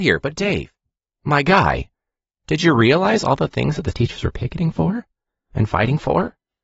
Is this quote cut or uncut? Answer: uncut